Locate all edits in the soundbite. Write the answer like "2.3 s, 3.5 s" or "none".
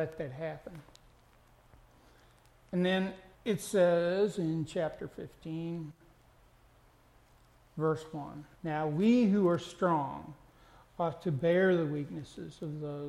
3.3 s, 8.6 s